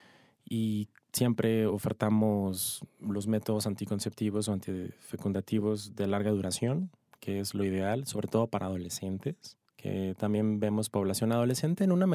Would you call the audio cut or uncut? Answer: uncut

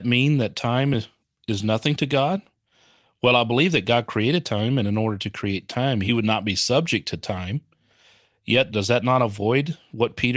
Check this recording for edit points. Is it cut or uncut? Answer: uncut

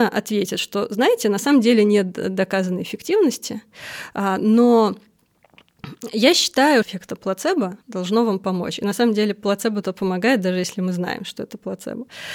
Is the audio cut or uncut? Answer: cut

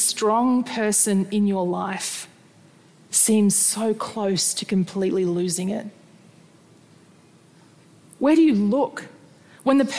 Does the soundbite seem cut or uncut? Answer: uncut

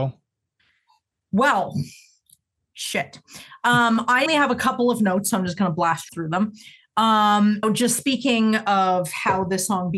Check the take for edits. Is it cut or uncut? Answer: cut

